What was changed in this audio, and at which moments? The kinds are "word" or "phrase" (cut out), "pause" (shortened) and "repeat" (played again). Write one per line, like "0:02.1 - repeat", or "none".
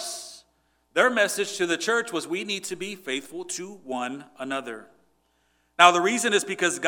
none